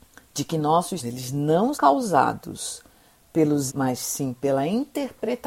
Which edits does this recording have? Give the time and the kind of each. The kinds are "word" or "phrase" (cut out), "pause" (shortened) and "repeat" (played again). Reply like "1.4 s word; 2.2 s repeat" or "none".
1.0 s word; 1.7 s word; 3.7 s word